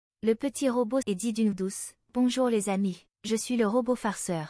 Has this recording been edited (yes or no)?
yes